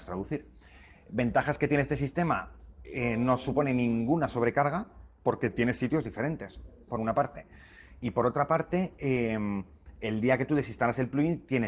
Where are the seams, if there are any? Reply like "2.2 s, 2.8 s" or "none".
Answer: none